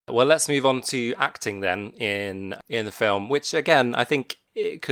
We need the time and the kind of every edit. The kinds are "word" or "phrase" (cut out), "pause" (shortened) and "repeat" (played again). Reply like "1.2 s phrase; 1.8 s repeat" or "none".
none